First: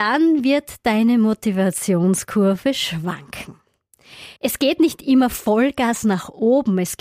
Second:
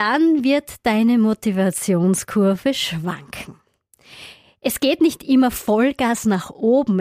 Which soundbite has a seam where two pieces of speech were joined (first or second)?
first